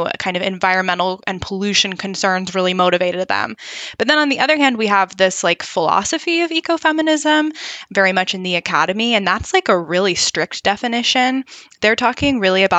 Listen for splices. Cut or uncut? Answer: uncut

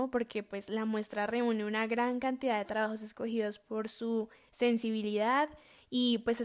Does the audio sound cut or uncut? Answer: uncut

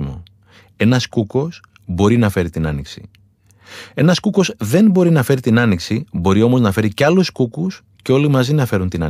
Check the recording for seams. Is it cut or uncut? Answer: uncut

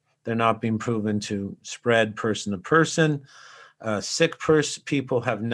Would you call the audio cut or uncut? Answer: uncut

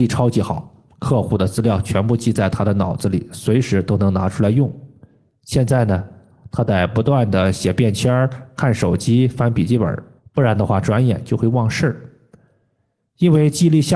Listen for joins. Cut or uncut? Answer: cut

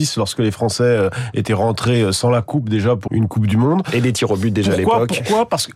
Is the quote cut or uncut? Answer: cut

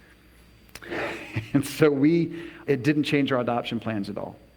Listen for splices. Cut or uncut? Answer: cut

